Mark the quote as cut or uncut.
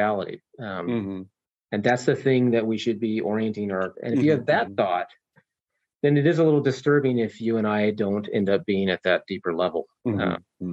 cut